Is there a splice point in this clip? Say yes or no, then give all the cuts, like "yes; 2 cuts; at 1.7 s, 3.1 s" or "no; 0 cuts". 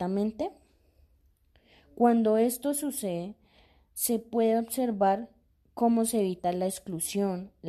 no; 0 cuts